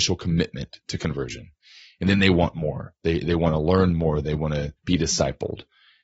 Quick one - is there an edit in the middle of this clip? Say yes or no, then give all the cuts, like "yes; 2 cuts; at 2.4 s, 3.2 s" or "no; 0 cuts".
yes; 1 cut; at 4.8 s